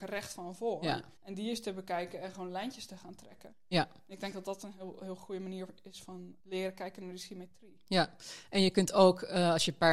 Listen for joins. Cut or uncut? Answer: cut